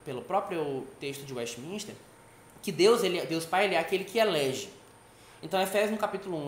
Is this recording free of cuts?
yes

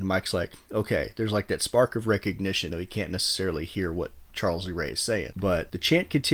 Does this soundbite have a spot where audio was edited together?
yes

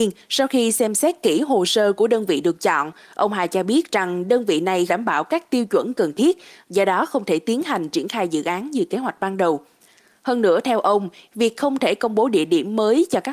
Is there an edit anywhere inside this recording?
yes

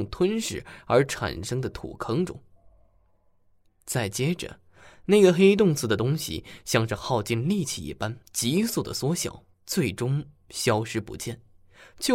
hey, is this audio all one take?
no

